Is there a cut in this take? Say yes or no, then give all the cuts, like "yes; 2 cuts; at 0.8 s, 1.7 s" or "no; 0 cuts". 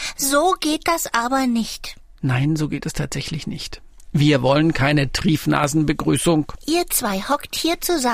no; 0 cuts